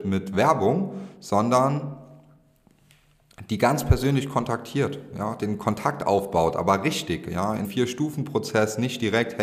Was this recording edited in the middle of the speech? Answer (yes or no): yes